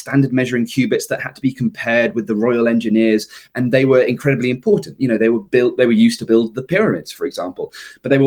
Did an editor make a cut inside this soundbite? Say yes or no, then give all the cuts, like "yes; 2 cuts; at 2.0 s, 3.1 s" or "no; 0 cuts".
no; 0 cuts